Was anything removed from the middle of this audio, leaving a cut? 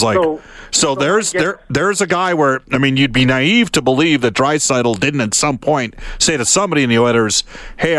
no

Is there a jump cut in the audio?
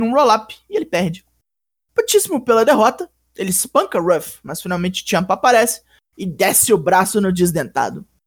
no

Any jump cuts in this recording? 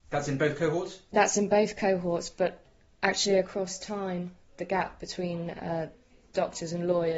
no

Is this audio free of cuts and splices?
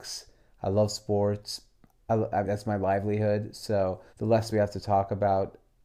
no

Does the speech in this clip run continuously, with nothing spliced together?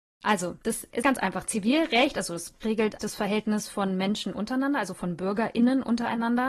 no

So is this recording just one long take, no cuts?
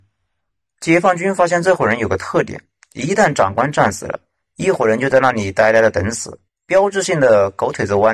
yes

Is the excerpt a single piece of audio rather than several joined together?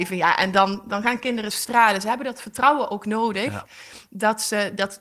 yes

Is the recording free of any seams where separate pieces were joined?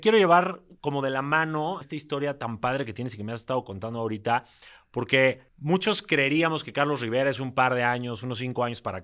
no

